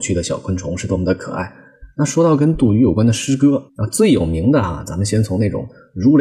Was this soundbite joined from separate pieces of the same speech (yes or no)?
yes